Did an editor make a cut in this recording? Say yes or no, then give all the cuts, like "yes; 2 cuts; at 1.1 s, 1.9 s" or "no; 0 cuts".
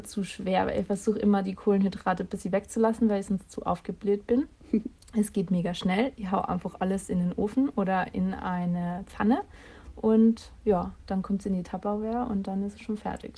no; 0 cuts